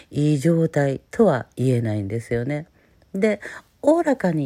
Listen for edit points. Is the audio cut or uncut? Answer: uncut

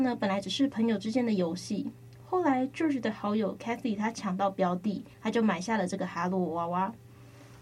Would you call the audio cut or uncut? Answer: cut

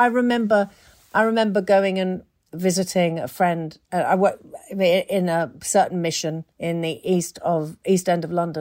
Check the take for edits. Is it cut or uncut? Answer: uncut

